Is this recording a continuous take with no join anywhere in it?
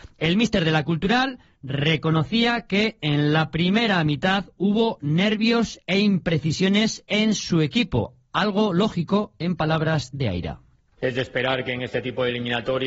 yes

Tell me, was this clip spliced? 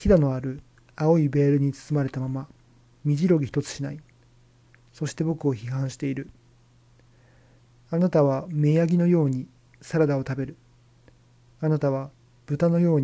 no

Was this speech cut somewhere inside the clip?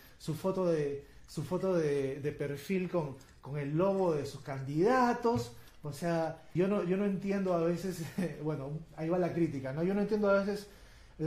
yes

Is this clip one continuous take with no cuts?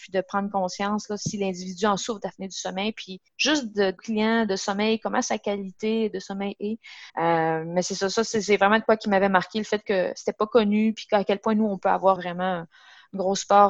no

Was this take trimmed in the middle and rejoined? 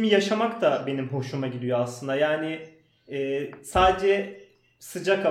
no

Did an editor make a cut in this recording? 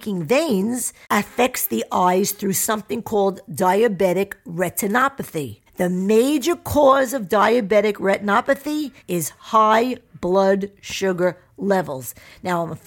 yes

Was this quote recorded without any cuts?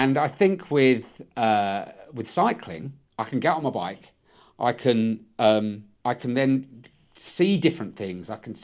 no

